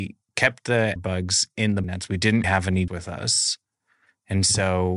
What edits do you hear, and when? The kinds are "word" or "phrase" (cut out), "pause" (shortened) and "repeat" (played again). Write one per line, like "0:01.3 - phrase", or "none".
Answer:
0:01.0 - word
0:01.8 - word
0:02.4 - word
0:02.9 - word